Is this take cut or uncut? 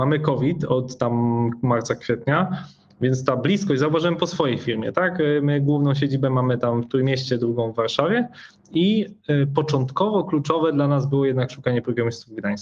uncut